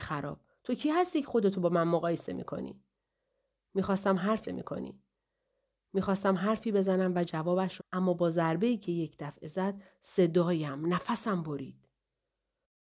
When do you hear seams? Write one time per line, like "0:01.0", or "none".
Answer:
0:04.5
0:07.8